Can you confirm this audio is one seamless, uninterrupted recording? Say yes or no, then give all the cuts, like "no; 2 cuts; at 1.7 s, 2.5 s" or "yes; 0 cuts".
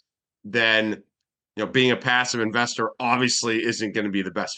yes; 0 cuts